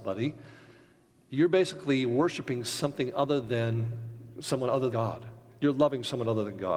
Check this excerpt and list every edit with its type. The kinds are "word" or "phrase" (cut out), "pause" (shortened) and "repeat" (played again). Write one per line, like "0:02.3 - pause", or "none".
0:04.9 - word